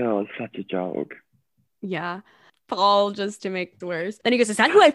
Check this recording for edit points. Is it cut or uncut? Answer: cut